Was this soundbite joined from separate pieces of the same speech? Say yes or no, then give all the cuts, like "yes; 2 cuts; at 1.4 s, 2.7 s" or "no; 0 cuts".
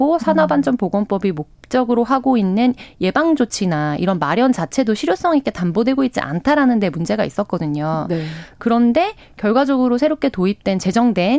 no; 0 cuts